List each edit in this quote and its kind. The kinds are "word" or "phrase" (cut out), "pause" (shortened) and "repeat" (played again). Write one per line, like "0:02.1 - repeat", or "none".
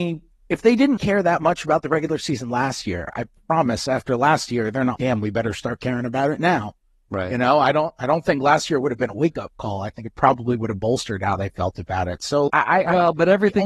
0:01.0 - word
0:05.0 - word
0:12.5 - word